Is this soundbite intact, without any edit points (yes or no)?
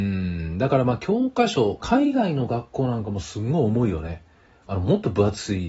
no